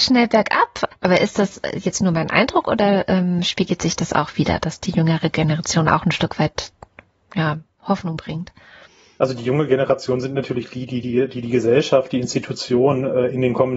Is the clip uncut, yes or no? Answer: yes